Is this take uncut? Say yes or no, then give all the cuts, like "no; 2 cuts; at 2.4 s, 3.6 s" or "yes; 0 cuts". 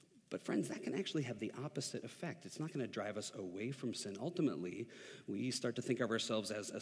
yes; 0 cuts